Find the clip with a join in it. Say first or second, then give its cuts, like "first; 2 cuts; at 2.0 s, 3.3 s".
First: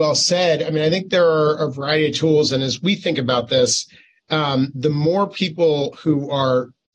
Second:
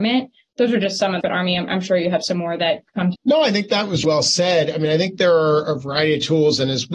second; 3 cuts; at 1.2 s, 3.1 s, 4.0 s